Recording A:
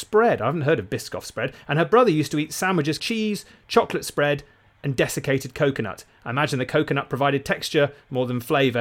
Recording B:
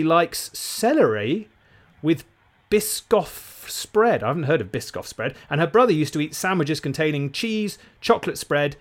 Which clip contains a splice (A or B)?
A